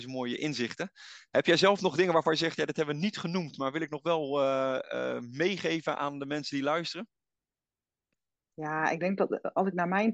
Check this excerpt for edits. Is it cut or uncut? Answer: uncut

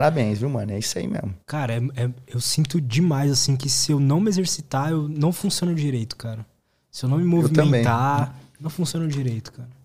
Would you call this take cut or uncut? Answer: cut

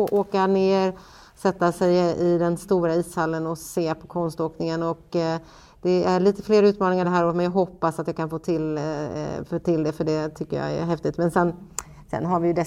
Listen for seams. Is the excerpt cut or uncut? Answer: uncut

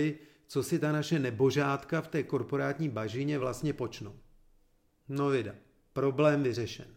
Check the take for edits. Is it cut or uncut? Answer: uncut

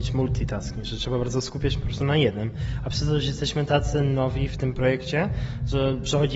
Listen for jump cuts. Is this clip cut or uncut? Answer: uncut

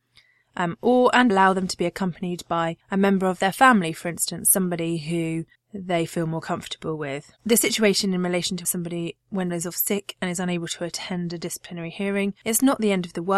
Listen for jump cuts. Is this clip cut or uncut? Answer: cut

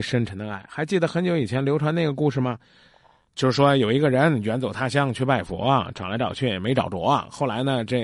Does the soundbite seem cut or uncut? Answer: uncut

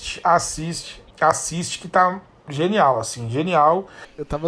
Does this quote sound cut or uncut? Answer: cut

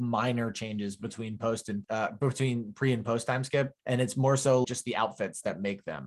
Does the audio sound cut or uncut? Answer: cut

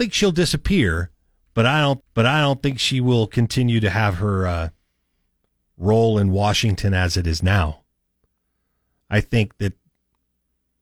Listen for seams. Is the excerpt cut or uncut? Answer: cut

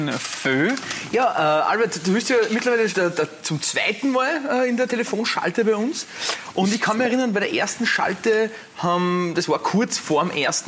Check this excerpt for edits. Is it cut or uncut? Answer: cut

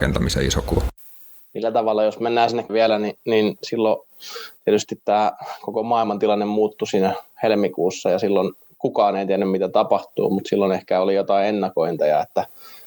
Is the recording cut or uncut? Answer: cut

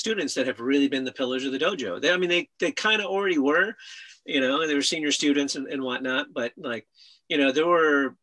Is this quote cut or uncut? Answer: uncut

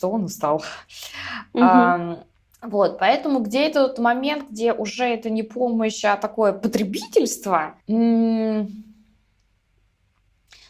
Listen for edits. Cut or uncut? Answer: cut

